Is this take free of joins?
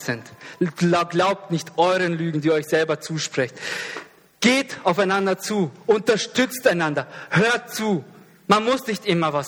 yes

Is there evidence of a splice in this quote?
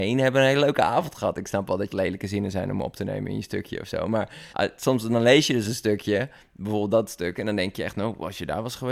yes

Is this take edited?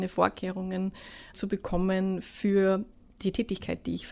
no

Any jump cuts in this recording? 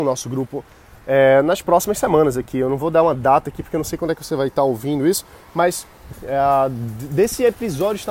no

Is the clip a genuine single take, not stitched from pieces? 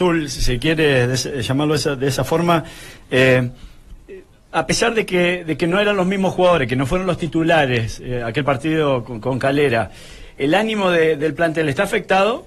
yes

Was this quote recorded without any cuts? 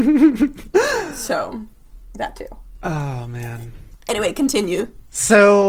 yes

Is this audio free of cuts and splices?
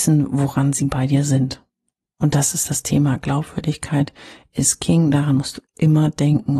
no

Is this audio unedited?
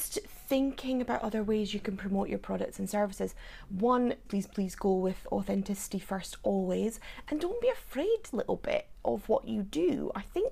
no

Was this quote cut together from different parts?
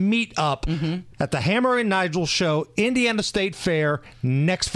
no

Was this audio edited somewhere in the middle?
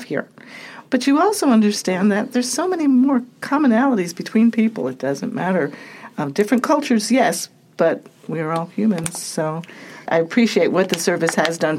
yes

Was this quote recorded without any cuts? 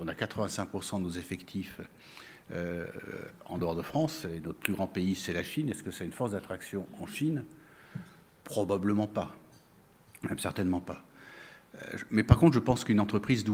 yes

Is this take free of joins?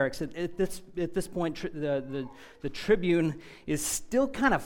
yes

